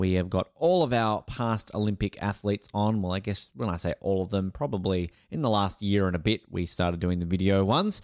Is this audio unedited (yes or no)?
yes